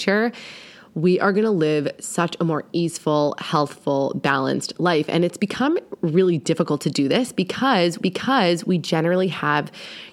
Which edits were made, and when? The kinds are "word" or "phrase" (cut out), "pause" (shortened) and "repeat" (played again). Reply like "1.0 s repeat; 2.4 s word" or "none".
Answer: 8.0 s repeat